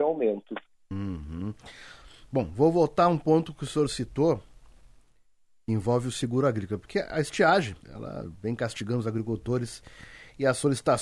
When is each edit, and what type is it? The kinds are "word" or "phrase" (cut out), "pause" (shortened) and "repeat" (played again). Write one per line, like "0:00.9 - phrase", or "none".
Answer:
0:07.8 - pause

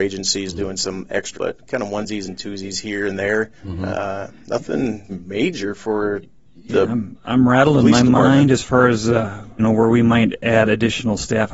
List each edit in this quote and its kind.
0:01.4 - word
0:03.6 - pause
0:05.1 - word
0:09.6 - word

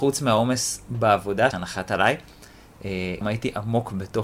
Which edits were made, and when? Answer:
0:01.5 - word
0:03.2 - word

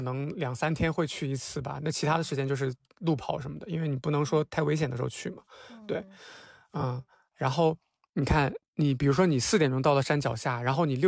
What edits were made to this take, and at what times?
none

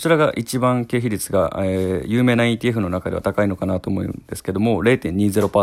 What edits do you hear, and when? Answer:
none

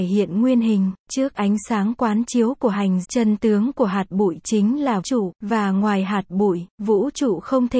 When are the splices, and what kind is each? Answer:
0:01.0 - pause
0:03.0 - word
0:05.0 - word
0:05.4 - pause
0:06.7 - pause

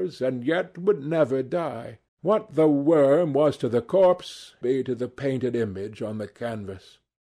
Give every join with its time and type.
0:02.1 - pause
0:04.6 - phrase

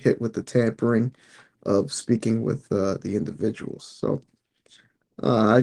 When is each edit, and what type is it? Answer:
none

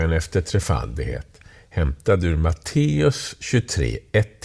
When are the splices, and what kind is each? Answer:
none

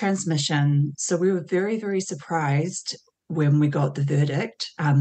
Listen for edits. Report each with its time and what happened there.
none

